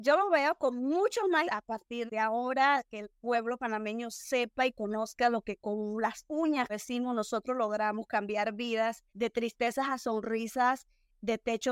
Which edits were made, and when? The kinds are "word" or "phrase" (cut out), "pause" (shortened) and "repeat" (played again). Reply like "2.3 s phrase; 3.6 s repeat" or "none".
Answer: 1.4 s word; 2.1 s word; 6.7 s word; 9.1 s pause